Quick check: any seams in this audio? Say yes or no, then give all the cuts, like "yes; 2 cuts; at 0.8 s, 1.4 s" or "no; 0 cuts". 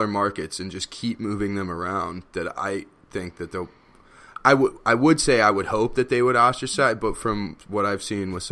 no; 0 cuts